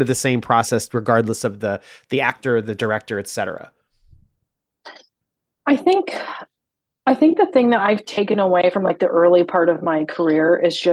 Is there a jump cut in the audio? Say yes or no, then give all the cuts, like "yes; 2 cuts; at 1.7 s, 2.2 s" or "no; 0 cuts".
no; 0 cuts